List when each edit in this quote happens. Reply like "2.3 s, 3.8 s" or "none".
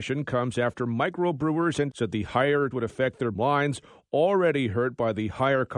1.9 s, 2.7 s, 3.3 s